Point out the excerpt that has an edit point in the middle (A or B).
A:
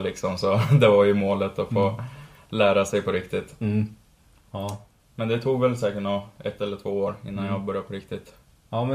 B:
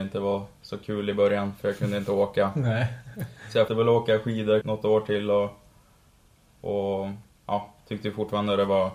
B